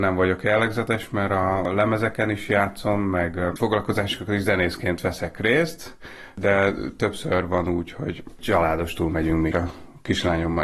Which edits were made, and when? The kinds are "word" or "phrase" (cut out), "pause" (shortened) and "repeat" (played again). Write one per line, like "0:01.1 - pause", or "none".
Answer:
0:09.5 - word